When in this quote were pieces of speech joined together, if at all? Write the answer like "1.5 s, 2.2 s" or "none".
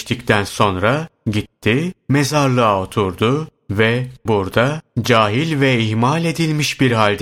4.3 s